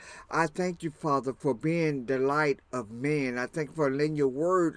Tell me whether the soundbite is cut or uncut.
uncut